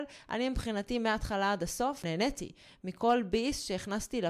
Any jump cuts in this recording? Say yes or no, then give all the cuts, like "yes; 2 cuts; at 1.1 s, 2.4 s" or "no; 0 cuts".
no; 0 cuts